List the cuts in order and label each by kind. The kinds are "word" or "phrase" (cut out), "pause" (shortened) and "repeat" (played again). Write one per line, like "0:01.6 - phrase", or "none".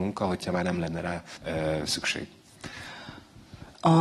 0:01.4 - word